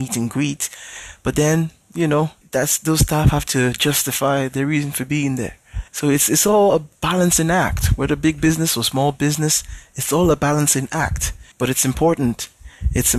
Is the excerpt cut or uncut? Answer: cut